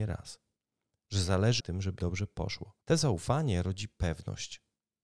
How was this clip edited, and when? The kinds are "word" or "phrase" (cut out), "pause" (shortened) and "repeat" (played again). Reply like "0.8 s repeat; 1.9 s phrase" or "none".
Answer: 1.6 s phrase; 2.0 s word; 2.8 s pause